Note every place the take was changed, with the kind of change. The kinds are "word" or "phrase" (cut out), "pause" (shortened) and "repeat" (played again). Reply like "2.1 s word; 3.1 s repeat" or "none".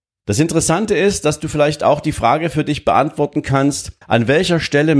4.0 s pause